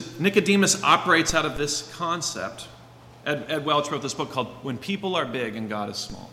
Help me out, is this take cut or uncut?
uncut